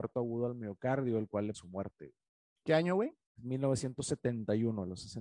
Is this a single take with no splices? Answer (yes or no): no